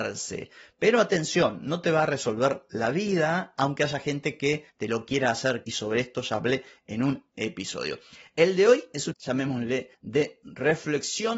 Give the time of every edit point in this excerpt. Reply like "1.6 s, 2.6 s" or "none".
5.6 s, 9.1 s